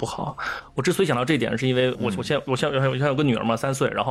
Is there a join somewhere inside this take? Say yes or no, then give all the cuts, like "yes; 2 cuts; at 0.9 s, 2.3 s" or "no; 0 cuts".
yes; 1 cut; at 1.9 s